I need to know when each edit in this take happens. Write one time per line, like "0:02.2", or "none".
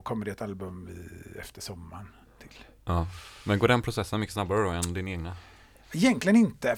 none